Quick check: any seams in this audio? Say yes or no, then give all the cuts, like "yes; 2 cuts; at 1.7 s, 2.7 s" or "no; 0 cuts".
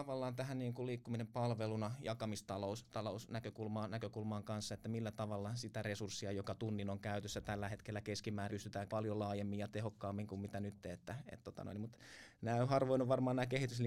yes; 2 cuts; at 8.5 s, 8.9 s